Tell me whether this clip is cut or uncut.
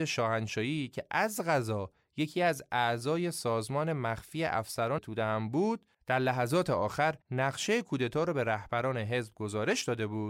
cut